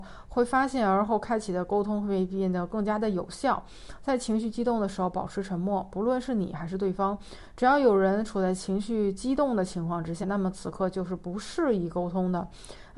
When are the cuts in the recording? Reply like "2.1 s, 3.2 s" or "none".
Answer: 10.2 s

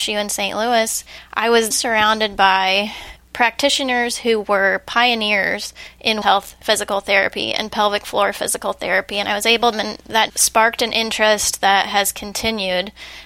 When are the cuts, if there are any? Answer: 1.7 s, 6.2 s, 9.7 s, 10.3 s

